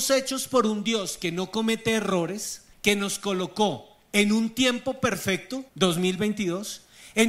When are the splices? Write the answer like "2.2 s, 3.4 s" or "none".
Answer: 2.7 s, 5.7 s